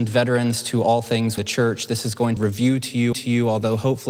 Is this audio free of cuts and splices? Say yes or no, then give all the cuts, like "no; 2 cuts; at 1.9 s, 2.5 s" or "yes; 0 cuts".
no; 3 cuts; at 1.4 s, 2.4 s, 3.1 s